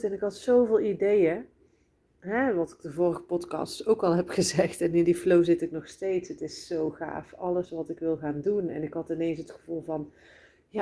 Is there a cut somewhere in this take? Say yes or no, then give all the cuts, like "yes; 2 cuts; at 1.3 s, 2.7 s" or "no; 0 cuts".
no; 0 cuts